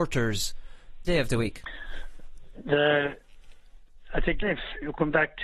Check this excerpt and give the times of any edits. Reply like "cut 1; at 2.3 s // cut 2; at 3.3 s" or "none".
cut 1; at 1.1 s // cut 2; at 4.4 s